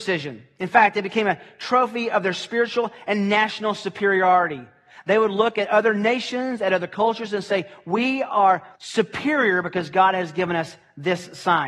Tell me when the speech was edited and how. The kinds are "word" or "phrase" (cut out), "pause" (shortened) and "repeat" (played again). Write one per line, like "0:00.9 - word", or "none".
0:08.7 - pause